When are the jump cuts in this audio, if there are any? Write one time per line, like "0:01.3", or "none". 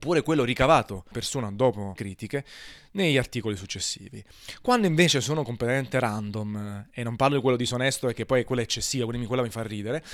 0:01.1
0:02.0